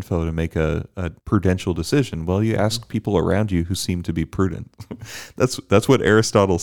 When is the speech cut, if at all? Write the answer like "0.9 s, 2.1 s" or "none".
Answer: 1.2 s